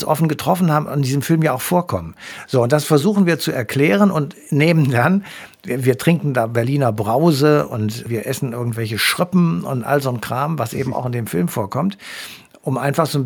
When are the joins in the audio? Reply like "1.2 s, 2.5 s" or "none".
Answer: 4.4 s